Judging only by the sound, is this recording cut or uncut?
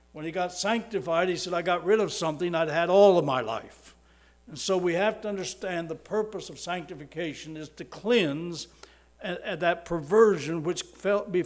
uncut